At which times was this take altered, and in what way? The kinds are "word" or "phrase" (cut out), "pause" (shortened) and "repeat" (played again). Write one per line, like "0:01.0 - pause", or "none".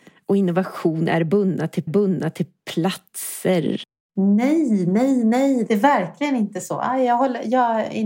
0:01.9 - repeat